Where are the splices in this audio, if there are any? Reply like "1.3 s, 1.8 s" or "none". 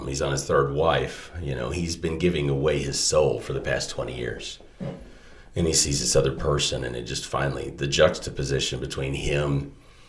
none